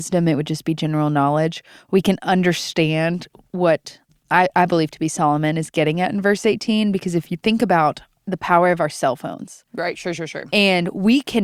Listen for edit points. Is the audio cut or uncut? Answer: uncut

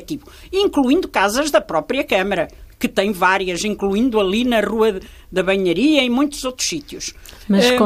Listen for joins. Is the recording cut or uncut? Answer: uncut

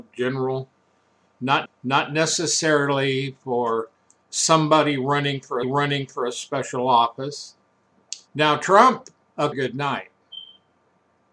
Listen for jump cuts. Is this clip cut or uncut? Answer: cut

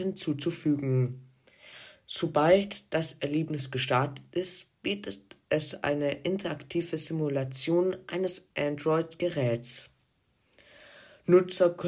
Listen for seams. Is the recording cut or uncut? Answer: uncut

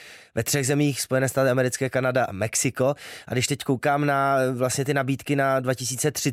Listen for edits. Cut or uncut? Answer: uncut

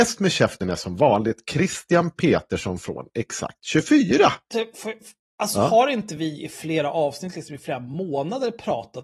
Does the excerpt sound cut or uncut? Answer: uncut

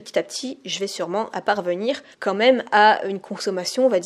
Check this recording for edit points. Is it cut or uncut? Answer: cut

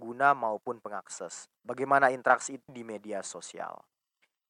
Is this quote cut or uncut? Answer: cut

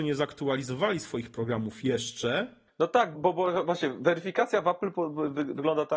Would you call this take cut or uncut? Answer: cut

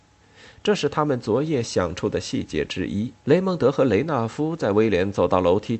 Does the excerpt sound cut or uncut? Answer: cut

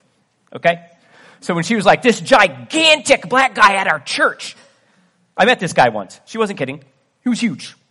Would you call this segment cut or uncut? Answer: uncut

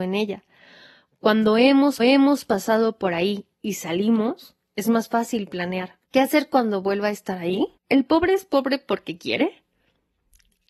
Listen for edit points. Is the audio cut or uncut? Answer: cut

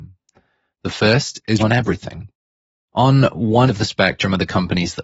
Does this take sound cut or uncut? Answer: cut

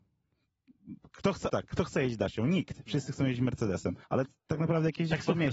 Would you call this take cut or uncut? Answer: cut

